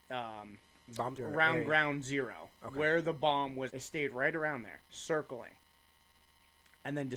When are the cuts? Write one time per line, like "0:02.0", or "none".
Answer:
0:01.2
0:03.7
0:04.9